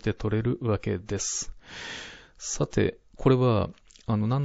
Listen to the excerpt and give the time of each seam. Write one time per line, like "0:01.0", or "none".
0:03.1